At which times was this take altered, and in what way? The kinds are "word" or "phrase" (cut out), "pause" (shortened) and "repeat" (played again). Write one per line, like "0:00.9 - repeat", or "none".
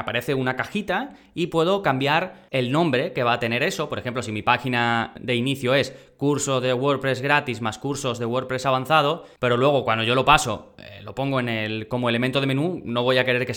none